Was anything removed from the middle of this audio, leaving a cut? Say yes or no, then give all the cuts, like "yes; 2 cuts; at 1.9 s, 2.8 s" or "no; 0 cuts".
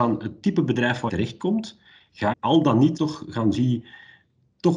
yes; 4 cuts; at 1.1 s, 2.3 s, 3.0 s, 3.5 s